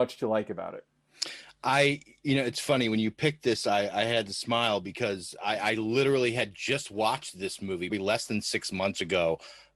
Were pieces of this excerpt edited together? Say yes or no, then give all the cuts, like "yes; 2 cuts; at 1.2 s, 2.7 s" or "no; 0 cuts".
yes; 1 cut; at 7.9 s